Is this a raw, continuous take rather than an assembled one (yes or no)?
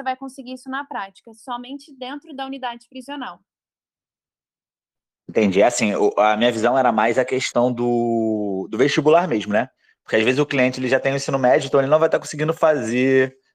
yes